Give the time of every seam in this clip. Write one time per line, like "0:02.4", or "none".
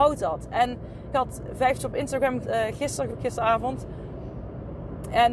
0:01.1
0:01.8
0:02.4
0:03.1